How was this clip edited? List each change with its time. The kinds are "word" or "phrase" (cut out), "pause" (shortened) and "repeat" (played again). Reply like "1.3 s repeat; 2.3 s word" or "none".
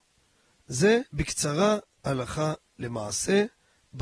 1.1 s pause